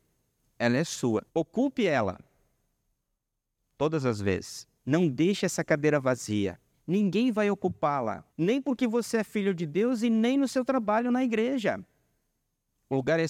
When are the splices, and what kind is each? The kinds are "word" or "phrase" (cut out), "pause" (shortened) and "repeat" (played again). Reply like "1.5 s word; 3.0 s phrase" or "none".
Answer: 1.3 s pause; 4.8 s pause; 6.7 s pause; 8.3 s pause

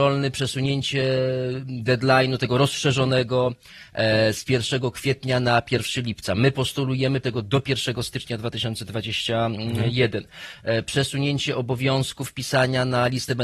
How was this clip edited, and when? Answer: 7.2 s word

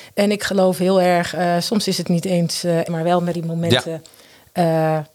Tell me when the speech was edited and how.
2.9 s phrase; 3.3 s word

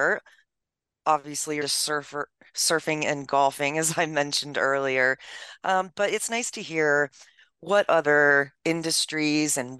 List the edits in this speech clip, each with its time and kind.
1.6 s word

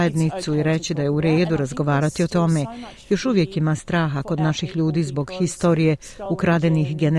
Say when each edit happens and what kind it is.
none

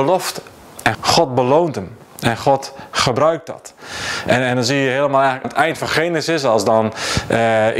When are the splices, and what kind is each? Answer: 0.9 s word; 5.4 s word

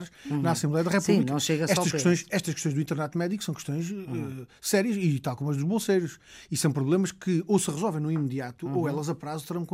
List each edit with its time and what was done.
none

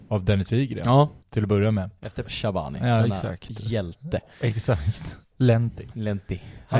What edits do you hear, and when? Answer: 1.2 s pause; 2.2 s phrase

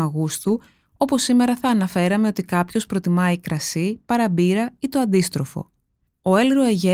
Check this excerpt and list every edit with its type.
none

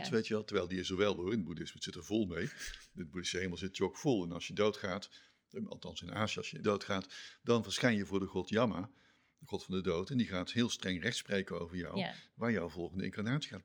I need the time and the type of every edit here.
6.6 s word

